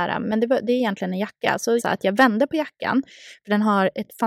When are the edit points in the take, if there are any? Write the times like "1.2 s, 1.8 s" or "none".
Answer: 1.8 s